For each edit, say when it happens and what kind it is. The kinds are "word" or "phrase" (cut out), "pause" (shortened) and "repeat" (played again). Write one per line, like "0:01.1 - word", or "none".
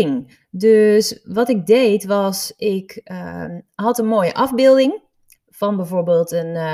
none